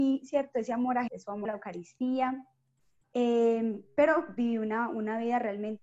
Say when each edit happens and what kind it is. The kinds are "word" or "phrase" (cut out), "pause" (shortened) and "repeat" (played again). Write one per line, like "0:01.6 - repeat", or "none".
0:01.1 - word
0:01.4 - word